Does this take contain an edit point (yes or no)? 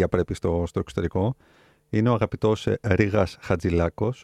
no